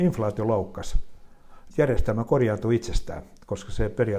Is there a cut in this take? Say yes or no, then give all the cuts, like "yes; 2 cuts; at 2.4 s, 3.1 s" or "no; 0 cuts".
yes; 1 cut; at 1.7 s